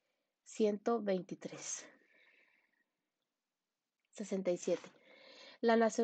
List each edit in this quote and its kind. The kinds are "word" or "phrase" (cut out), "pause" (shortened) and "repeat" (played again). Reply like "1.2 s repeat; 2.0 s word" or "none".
none